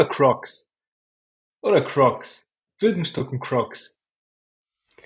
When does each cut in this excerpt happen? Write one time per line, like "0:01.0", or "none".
none

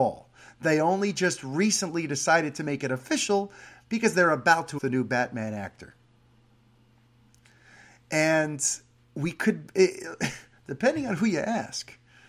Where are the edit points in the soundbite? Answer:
0:04.8

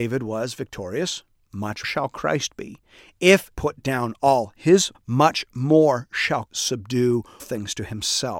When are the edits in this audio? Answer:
0:01.8
0:03.5
0:04.9
0:06.5
0:07.4

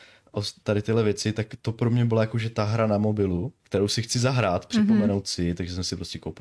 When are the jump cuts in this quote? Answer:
0:03.6

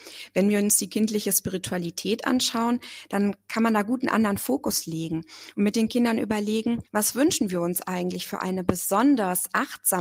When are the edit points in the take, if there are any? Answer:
0:06.9

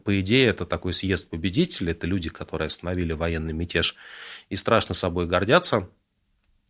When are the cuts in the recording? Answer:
none

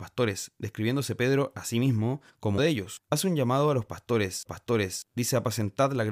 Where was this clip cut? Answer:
0:02.6
0:04.5

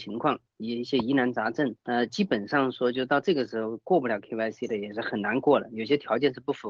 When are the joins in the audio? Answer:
0:01.8

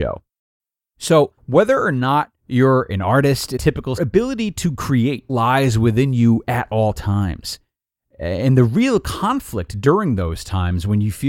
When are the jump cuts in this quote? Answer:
0:01.4
0:02.4
0:03.6
0:04.0
0:05.3

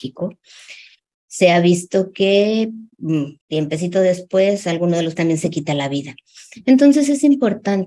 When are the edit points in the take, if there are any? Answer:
0:03.4
0:05.2

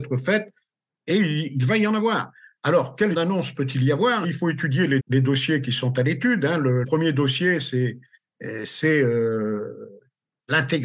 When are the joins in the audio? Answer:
0:01.1
0:03.1
0:04.2
0:05.0
0:06.8

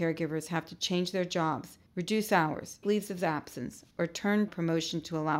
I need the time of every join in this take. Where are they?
0:01.9
0:02.8
0:03.9
0:04.5

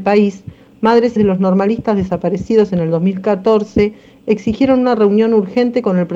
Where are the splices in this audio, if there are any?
0:01.2

